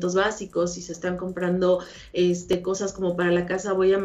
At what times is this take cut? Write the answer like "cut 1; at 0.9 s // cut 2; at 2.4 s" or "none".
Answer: none